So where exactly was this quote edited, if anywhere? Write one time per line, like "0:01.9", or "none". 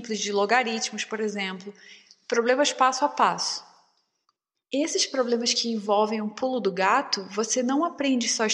none